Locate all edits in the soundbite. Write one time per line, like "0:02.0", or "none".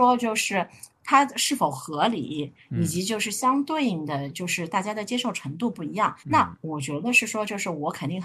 0:06.2